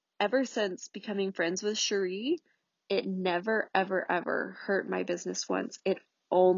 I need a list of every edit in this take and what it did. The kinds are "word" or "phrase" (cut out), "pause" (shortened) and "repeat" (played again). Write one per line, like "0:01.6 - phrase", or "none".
none